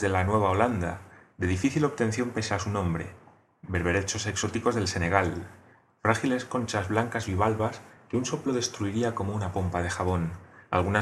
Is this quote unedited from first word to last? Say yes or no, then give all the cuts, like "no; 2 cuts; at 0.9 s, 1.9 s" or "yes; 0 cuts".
yes; 0 cuts